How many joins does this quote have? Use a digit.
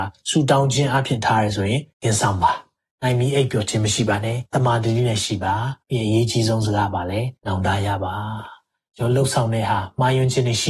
4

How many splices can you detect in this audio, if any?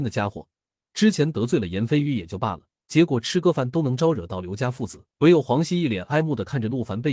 2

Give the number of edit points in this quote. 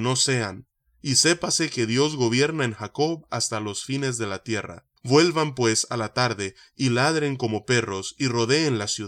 1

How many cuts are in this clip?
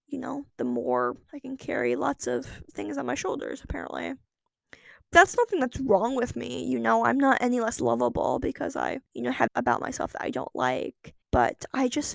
5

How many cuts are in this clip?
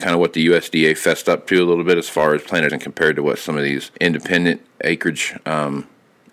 2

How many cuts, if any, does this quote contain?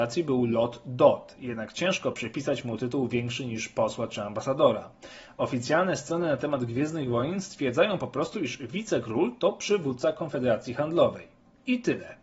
0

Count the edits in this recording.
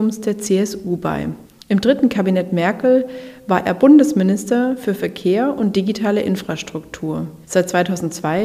2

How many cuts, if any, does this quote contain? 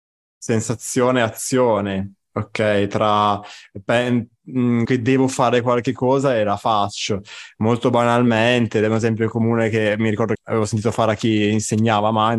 2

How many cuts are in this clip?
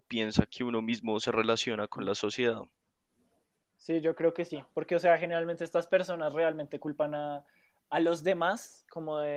0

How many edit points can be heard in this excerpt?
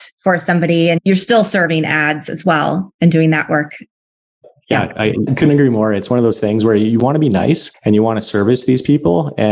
0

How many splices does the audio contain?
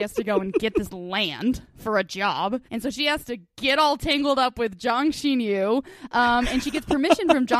1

